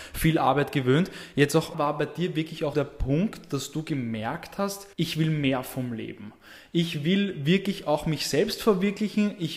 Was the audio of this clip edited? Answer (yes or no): yes